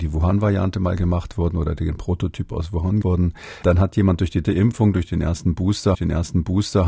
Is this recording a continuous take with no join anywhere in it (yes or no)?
no